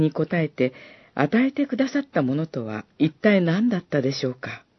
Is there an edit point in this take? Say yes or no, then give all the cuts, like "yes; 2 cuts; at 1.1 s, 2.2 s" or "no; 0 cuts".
yes; 1 cut; at 2.9 s